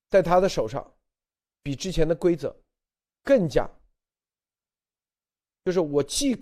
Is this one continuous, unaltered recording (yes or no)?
yes